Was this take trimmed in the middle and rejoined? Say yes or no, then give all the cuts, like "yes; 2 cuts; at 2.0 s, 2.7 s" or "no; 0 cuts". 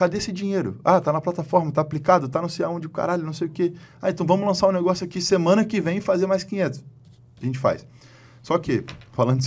no; 0 cuts